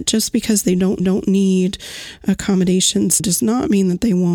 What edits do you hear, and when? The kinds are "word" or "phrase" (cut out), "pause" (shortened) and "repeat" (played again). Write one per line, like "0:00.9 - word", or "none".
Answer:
0:01.0 - repeat
0:03.2 - word